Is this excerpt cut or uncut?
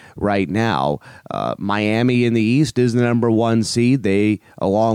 uncut